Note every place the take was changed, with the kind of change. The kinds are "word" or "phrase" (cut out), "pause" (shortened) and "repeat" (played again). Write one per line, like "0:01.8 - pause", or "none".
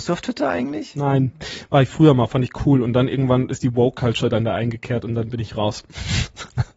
none